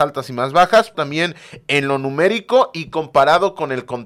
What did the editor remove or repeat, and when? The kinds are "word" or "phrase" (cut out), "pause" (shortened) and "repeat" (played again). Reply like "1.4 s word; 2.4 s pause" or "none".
0.9 s word